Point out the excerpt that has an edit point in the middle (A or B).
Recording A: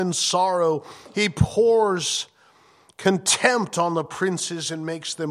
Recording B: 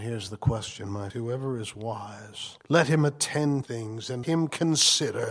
B